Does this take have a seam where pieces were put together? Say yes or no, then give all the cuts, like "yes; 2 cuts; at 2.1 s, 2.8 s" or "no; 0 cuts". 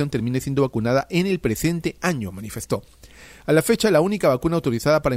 no; 0 cuts